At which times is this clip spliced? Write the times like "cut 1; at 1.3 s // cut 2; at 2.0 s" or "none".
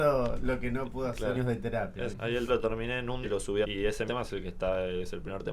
cut 1; at 1.3 s // cut 2; at 2.1 s // cut 3; at 2.5 s // cut 4; at 3.2 s // cut 5; at 3.6 s // cut 6; at 4.1 s